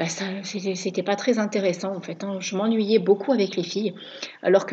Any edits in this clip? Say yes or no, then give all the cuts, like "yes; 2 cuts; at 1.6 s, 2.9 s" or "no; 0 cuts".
no; 0 cuts